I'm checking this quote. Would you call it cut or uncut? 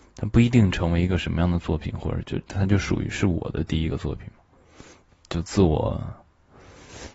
uncut